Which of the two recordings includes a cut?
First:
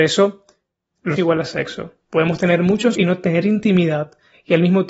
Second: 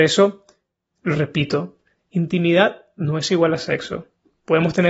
first; 3 cuts; at 1.2 s, 2.0 s, 2.9 s

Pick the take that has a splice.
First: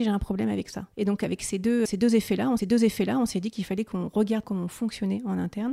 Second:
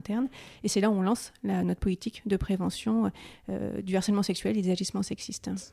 first; 4 cuts; at 0.9 s, 1.9 s, 2.6 s, 4.4 s

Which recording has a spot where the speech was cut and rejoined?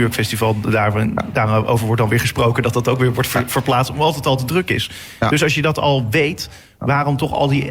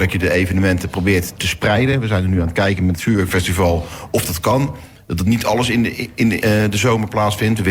second; 1 cut; at 6.4 s

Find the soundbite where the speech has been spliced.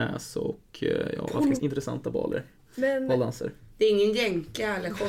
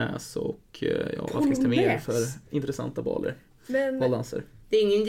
first; 1 cut; at 1.6 s

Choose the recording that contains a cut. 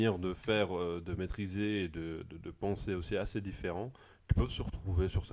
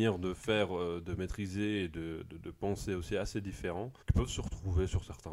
second; 1 cut; at 4.0 s

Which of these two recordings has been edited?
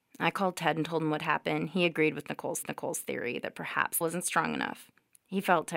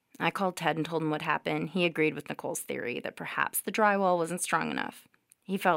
first; 2 cuts; at 2.6 s, 4.0 s

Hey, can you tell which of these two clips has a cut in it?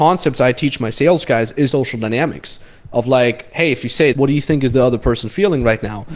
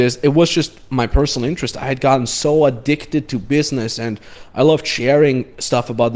first; 2 cuts; at 1.7 s, 4.1 s

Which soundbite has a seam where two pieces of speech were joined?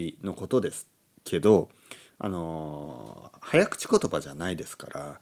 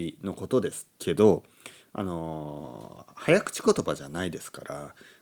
second; 1 cut; at 0.9 s

